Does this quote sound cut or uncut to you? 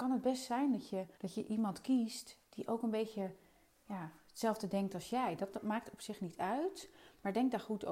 cut